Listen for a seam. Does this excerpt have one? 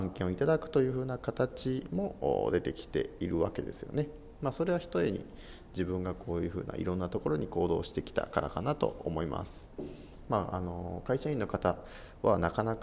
no; 0 cuts

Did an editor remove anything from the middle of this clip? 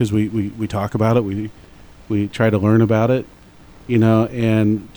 no; 0 cuts

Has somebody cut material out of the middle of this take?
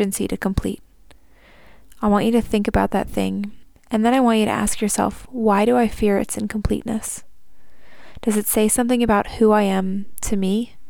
no; 0 cuts

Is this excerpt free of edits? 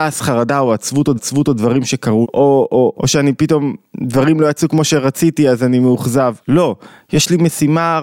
no; 4 cuts; at 1.2 s, 2.2 s, 2.9 s, 6.4 s

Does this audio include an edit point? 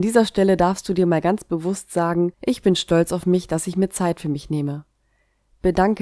no; 0 cuts

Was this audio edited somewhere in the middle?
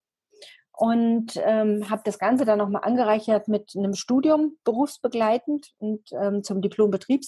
no; 0 cuts

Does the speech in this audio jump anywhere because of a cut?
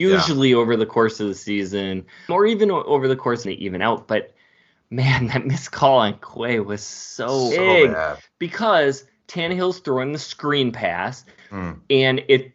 yes; 3 cuts; at 2.3 s, 3.5 s, 7.5 s

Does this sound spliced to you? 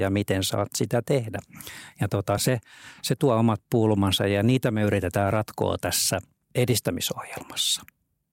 no; 0 cuts

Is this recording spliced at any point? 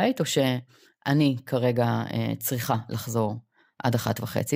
no; 0 cuts

